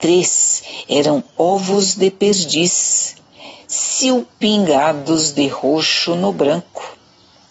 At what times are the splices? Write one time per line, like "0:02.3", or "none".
none